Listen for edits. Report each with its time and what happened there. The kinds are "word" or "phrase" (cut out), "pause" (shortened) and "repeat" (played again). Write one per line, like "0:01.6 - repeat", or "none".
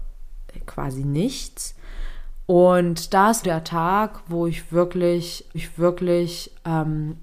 0:03.4 - phrase
0:05.5 - repeat